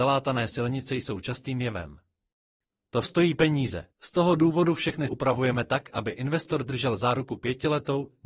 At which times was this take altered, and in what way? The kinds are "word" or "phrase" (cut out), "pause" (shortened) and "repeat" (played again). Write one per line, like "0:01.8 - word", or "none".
0:03.0 - word
0:03.9 - pause
0:05.1 - word